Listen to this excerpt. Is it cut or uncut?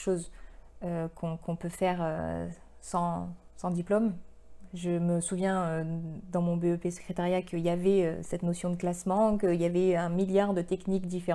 uncut